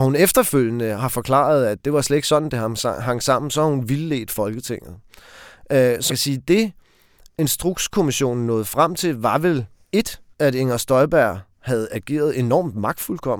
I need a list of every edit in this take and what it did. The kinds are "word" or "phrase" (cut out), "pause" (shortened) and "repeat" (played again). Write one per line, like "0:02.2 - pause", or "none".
0:06.1 - word
0:10.3 - pause
0:11.5 - pause